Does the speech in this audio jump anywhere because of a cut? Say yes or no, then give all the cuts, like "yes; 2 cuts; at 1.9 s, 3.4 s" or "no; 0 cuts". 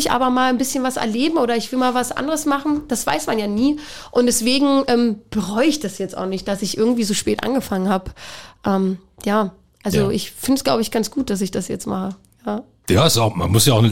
no; 0 cuts